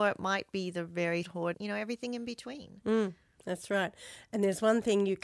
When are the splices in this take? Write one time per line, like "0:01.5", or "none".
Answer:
0:01.2
0:01.5